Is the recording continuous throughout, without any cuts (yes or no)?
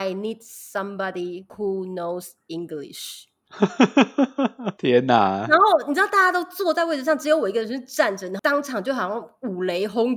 no